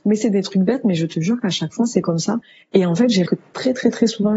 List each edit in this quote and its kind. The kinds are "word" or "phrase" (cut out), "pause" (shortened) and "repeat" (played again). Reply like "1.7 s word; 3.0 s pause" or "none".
3.2 s word